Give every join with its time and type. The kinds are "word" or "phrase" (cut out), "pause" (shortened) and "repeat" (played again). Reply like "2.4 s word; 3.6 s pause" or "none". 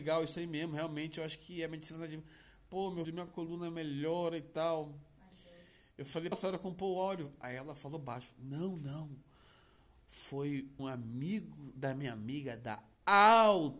3.0 s word; 6.3 s word; 10.8 s word